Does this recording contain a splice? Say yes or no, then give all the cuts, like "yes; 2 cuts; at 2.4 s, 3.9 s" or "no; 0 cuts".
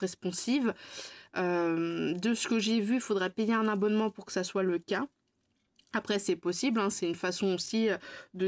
no; 0 cuts